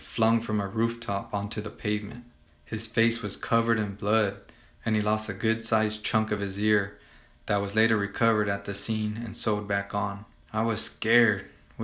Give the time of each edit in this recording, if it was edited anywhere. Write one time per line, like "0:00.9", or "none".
none

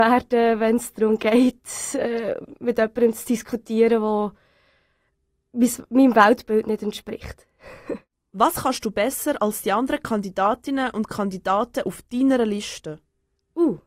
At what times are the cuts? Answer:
none

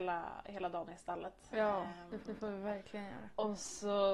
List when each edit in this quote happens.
0:02.2

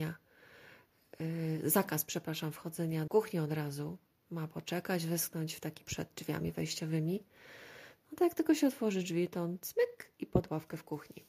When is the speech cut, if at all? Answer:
0:03.1
0:05.8

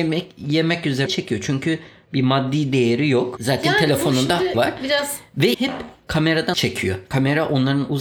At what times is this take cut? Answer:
0:01.1
0:04.5
0:05.5
0:06.5

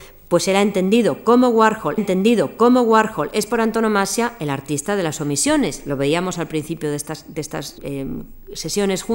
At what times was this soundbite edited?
0:02.0
0:07.8

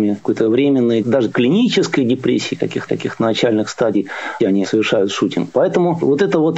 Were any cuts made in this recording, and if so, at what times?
0:01.0
0:02.9
0:04.4

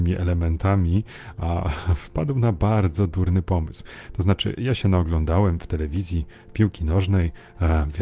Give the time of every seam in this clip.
none

